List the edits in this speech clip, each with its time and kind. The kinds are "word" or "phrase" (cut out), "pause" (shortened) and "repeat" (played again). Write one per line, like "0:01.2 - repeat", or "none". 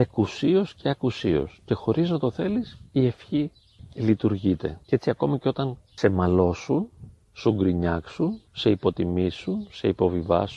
0:04.8 - pause
0:08.5 - pause